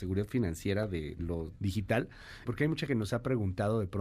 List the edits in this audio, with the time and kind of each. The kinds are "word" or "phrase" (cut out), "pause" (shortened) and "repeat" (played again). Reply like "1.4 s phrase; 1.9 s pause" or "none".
1.2 s word; 1.6 s word; 2.5 s word; 2.9 s word

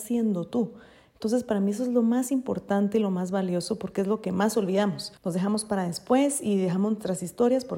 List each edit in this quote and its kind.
5.2 s pause

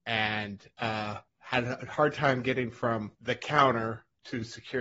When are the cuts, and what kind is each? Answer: 1.3 s pause; 3.1 s pause

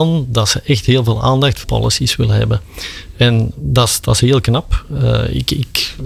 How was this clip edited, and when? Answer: 1.6 s phrase

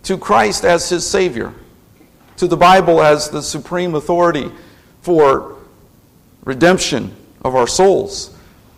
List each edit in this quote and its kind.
none

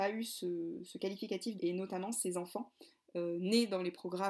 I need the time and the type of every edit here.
1.6 s word

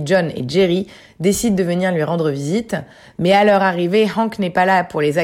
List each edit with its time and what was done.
none

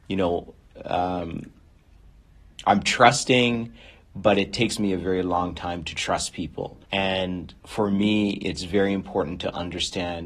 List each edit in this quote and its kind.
6.8 s pause

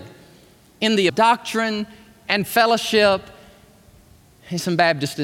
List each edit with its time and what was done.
1.1 s word

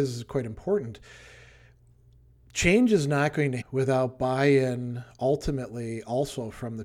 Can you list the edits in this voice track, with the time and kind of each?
3.6 s word

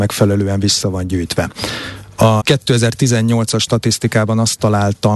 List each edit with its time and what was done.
2.4 s word

